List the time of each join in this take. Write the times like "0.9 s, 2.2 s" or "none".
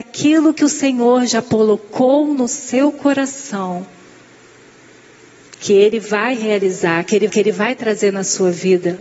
7.3 s